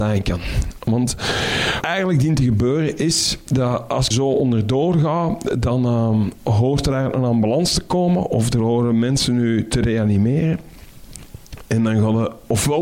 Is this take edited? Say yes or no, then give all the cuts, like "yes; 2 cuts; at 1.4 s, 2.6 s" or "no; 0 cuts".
yes; 2 cuts; at 1.8 s, 4.1 s